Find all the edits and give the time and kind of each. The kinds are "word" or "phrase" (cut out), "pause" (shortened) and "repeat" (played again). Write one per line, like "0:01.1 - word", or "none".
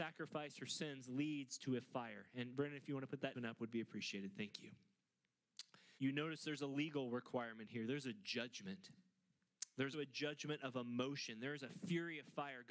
0:03.3 - word
0:06.0 - pause
0:09.9 - word